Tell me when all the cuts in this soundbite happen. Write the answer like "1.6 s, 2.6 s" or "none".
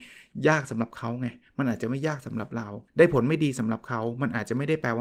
2.9 s